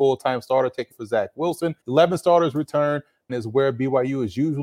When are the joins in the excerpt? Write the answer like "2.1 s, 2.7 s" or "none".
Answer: 0.9 s, 1.8 s, 3.3 s